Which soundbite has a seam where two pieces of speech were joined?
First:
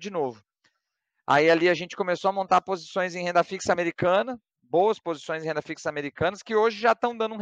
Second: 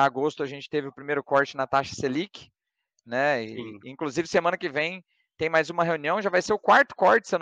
first; 1 cut; at 4.5 s

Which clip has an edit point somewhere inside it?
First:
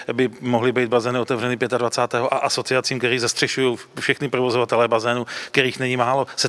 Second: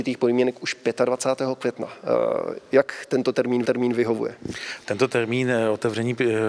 second; 1 cut; at 3.6 s

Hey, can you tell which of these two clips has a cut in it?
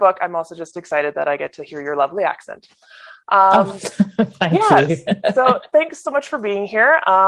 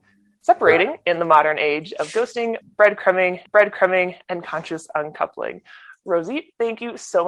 second; 1 cut; at 3.5 s

